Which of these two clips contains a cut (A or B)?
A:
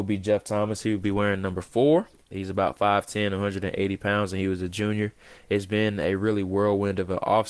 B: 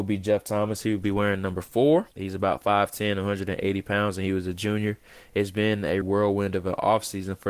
B